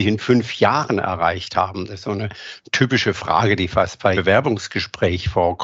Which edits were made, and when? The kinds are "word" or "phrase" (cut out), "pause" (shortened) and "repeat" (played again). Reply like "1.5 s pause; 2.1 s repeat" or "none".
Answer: 4.1 s word